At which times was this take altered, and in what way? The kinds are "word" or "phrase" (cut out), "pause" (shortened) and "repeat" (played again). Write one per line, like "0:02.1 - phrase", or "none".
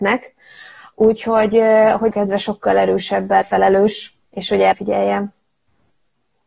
0:02.1 - phrase
0:03.4 - word
0:04.2 - pause
0:04.7 - word